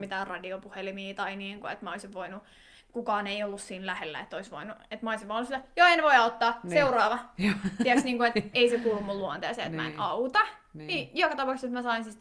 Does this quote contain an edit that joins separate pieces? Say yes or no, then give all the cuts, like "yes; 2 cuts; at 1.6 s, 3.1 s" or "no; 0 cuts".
yes; 1 cut; at 8.5 s